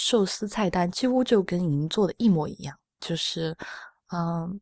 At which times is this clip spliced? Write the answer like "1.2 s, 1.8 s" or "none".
2.9 s

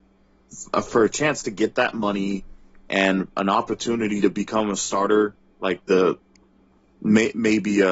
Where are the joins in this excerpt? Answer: none

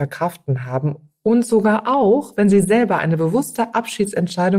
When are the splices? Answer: none

